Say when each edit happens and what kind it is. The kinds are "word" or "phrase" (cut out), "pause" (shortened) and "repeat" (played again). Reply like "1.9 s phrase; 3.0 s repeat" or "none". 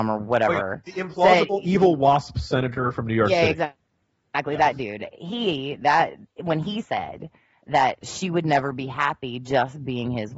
none